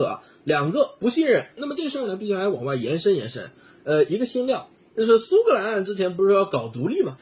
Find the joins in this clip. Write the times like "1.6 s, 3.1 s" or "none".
none